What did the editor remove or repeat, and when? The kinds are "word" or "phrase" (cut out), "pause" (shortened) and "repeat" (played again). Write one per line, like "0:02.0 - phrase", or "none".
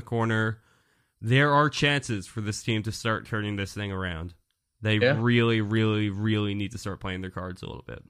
none